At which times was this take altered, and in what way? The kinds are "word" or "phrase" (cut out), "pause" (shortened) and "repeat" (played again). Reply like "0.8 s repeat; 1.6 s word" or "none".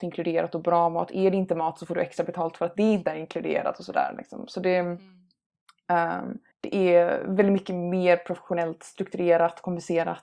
6.5 s pause